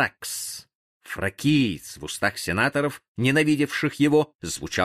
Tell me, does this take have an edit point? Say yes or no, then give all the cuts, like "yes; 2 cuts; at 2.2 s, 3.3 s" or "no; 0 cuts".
no; 0 cuts